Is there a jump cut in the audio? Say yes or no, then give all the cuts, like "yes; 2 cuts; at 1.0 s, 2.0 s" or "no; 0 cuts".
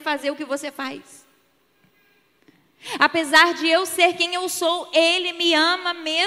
no; 0 cuts